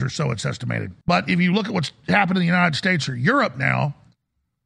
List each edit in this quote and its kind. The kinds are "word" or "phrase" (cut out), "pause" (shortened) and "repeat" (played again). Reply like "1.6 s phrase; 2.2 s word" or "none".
1.0 s pause